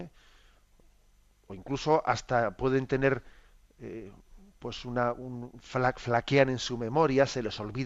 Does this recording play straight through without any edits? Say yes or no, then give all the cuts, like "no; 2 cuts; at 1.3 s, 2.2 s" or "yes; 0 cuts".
yes; 0 cuts